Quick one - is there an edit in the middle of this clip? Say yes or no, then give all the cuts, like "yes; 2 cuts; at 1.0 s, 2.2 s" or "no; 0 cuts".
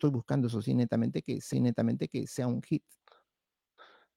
yes; 1 cut; at 1.5 s